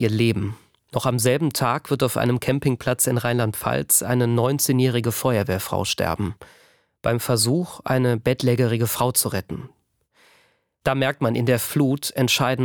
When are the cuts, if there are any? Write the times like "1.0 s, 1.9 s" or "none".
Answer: none